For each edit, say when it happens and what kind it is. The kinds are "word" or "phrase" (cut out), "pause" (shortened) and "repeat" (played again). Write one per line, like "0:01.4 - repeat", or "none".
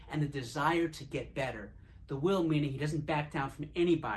none